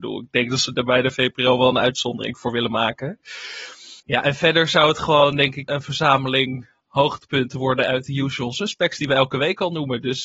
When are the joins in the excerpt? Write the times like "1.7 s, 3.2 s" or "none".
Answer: 4.0 s, 5.7 s